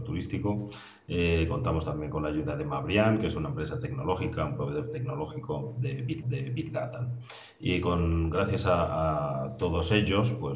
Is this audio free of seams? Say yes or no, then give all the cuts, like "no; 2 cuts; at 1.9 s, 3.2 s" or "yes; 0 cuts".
no; 1 cut; at 6.2 s